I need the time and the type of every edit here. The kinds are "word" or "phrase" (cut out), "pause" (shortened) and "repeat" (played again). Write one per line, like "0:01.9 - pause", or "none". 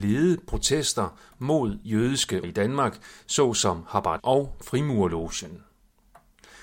0:01.8 - word
0:02.4 - word
0:04.2 - word